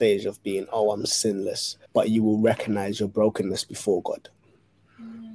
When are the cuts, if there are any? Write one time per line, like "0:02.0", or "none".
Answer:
0:01.9